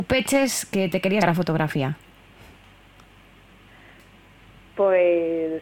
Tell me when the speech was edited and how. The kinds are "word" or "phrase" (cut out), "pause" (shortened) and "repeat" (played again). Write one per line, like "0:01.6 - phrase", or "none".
0:01.2 - word